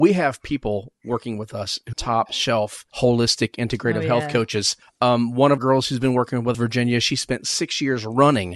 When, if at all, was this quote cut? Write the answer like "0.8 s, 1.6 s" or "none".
1.9 s, 2.9 s, 4.8 s, 5.6 s, 6.5 s